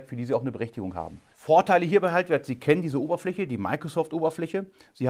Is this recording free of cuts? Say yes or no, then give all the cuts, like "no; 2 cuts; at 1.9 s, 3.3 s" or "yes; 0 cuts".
no; 1 cut; at 1.3 s